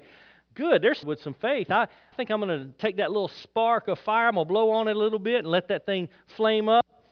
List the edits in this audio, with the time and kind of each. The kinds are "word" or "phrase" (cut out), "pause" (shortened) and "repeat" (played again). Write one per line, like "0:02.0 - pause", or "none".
0:01.0 - word
0:02.1 - word